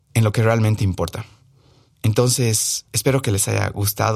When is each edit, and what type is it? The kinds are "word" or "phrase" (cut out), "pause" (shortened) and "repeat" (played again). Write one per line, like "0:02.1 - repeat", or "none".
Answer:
0:02.9 - pause

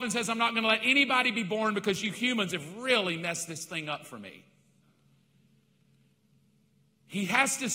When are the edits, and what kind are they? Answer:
none

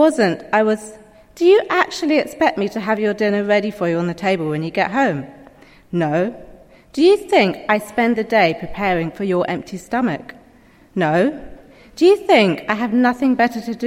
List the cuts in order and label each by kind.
none

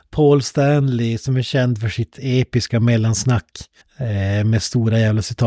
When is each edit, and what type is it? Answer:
0:03.8 - pause

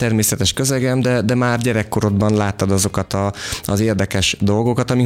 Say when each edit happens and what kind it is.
none

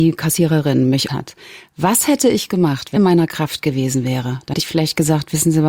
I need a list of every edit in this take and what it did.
0:01.1 - word
0:03.0 - phrase
0:04.5 - word

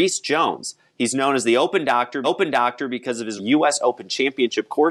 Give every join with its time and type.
0:02.2 - repeat
0:03.4 - phrase

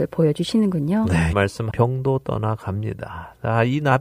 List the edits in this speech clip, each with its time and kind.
0:01.3 - word
0:01.7 - word

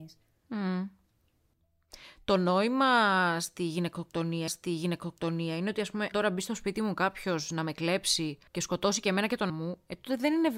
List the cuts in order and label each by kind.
0:04.5 - repeat
0:06.1 - word
0:08.5 - pause
0:09.5 - word

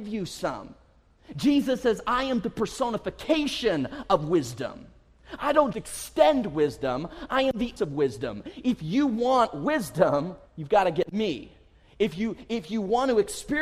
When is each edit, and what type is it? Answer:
0:05.7 - word
0:07.8 - word
0:10.5 - pause

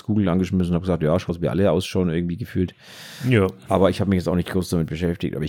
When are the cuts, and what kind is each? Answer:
0:01.3 - word

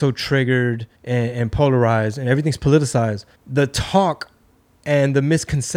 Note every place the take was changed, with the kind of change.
0:00.9 - pause
0:03.3 - pause

